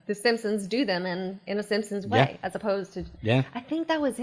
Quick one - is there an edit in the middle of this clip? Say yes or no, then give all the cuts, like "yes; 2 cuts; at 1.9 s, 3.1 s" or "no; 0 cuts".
yes; 1 cut; at 3.1 s